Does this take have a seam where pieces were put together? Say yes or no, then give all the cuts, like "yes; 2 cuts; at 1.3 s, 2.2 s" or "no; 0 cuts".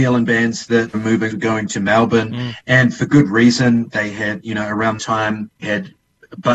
yes; 6 cuts; at 0.9 s, 1.3 s, 3.9 s, 4.4 s, 5.0 s, 5.6 s